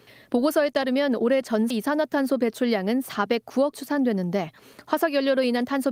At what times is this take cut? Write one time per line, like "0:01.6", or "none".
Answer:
0:01.7
0:03.7